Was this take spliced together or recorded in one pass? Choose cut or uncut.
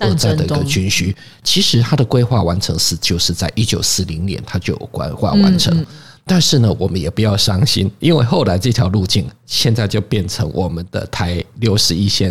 uncut